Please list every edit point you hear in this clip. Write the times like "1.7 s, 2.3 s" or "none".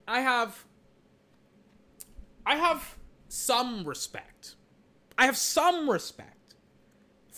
none